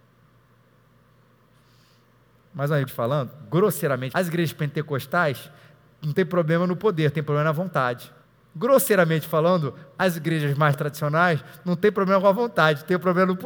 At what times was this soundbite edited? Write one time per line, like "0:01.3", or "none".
0:02.9
0:04.1
0:08.2